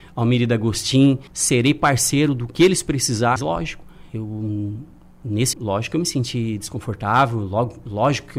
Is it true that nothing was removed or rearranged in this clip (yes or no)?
no